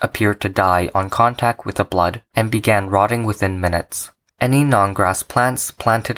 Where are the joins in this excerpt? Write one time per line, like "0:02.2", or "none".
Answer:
none

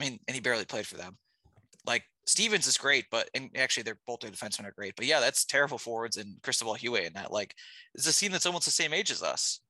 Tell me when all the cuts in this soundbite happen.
none

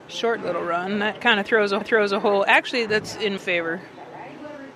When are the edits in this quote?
0:01.8
0:02.9
0:03.4

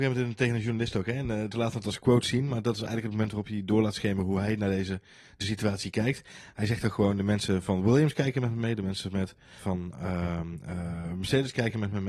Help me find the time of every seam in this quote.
0:01.5
0:05.4
0:09.6

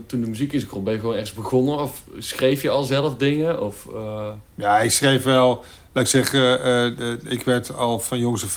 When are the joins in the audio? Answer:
0:04.4

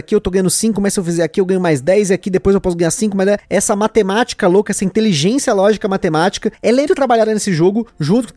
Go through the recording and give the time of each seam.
0:06.9

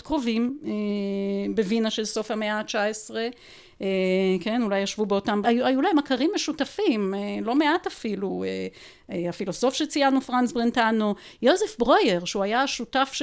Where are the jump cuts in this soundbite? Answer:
0:05.4

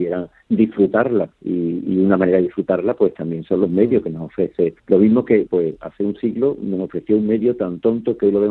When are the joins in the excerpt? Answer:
0:01.3
0:04.8
0:05.5

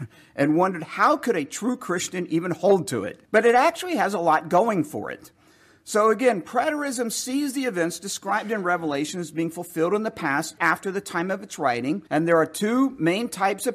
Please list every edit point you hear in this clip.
0:03.2
0:10.6
0:12.1

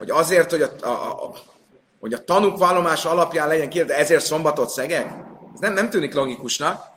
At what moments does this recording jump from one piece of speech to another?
none

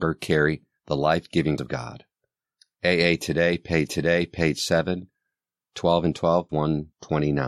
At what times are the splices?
0:01.6
0:03.9
0:06.5

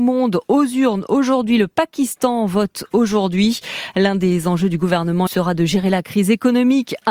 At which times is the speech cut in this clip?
0:05.3

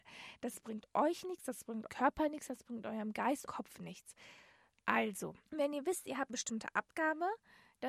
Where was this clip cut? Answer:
0:01.9
0:03.5
0:05.5
0:06.3

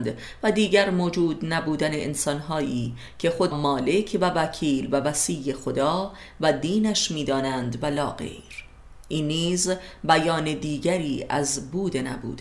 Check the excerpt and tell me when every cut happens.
0:03.5

